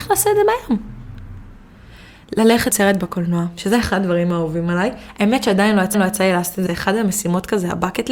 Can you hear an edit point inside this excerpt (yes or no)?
yes